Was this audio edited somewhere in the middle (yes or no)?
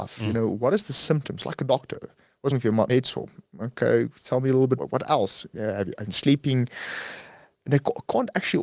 yes